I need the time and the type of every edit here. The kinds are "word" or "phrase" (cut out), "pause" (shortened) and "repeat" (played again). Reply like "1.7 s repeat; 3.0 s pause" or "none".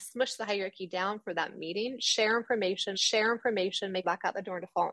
2.9 s repeat; 4.0 s phrase